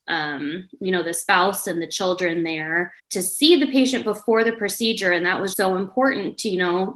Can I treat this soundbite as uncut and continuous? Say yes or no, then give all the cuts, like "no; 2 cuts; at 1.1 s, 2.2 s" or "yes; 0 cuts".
no; 2 cuts; at 3.0 s, 5.5 s